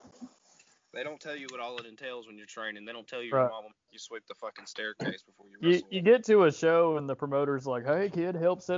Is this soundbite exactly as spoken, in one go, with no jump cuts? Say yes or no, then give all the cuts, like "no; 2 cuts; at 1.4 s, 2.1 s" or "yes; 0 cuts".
yes; 0 cuts